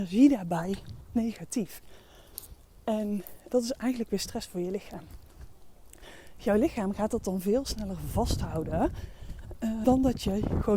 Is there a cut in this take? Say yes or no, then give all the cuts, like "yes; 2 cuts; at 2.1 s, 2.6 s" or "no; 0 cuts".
yes; 3 cuts; at 1.1 s, 3.5 s, 9.8 s